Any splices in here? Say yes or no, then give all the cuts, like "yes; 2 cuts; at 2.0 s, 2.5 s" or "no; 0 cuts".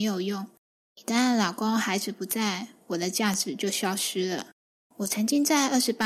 no; 0 cuts